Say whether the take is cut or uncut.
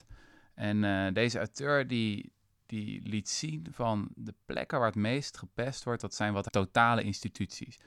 cut